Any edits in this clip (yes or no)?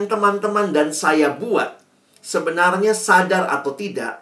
no